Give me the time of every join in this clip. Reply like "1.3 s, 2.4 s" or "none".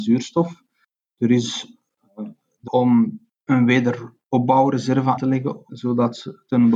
2.7 s, 3.5 s, 5.2 s, 5.7 s